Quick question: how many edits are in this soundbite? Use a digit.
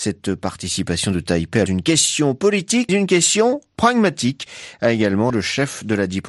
3